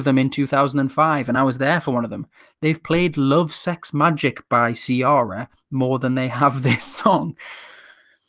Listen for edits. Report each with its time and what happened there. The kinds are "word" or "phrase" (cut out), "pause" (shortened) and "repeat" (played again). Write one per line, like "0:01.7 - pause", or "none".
none